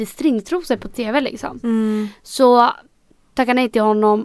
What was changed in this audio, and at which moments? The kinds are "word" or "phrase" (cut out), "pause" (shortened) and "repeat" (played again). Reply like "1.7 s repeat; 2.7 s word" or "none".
none